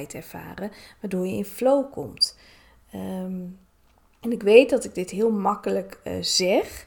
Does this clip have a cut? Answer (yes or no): no